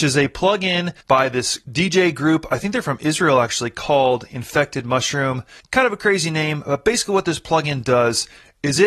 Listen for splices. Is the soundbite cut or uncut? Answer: cut